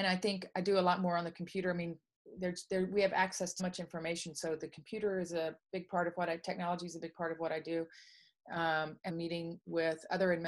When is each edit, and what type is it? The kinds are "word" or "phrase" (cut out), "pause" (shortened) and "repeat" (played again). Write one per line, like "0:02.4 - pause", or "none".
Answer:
0:03.6 - word
0:09.1 - word

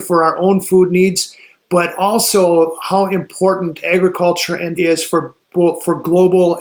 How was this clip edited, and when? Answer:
0:04.7 - word

